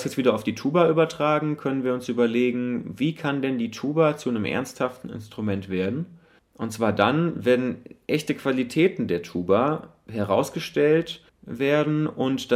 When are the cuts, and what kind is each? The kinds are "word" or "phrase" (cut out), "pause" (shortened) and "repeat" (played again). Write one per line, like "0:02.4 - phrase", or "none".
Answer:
0:06.4 - pause
0:11.3 - pause